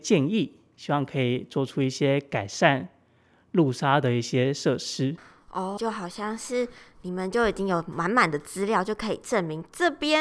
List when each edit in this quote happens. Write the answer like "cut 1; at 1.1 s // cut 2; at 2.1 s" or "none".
cut 1; at 5.8 s

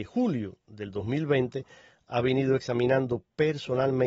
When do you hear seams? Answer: none

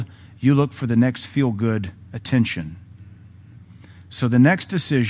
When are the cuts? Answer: none

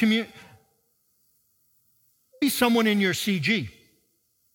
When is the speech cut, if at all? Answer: cut 1; at 2.4 s

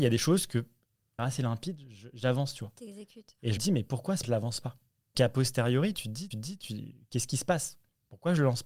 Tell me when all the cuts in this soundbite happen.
cut 1; at 1.2 s // cut 2; at 3.6 s // cut 3; at 4.2 s // cut 4; at 5.1 s // cut 5; at 5.9 s // cut 6; at 6.3 s

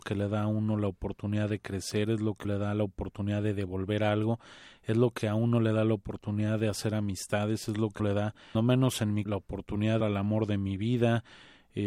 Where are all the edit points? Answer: cut 1; at 2.4 s // cut 2; at 8.0 s // cut 3; at 8.5 s // cut 4; at 9.3 s // cut 5; at 10.0 s

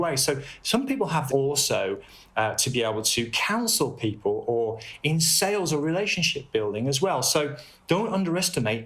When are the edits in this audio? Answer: cut 1; at 1.3 s

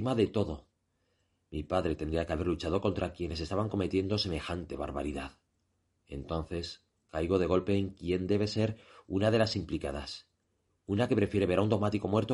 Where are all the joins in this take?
none

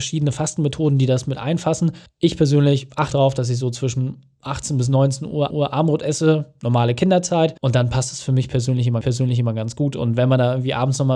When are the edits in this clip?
cut 1; at 2.1 s // cut 2; at 3.1 s // cut 3; at 5.5 s // cut 4; at 7.6 s // cut 5; at 9.0 s

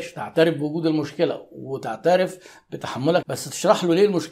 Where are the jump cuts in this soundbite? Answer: cut 1; at 3.2 s

